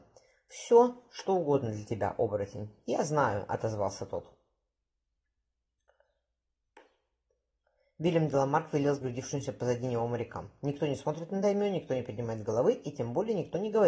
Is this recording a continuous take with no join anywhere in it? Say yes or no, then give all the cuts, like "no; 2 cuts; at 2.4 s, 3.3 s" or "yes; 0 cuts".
yes; 0 cuts